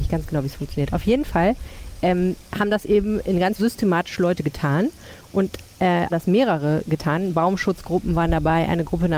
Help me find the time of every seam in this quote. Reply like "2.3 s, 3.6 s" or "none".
3.6 s, 6.1 s